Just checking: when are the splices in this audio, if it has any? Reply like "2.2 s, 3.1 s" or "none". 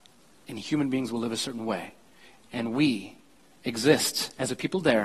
none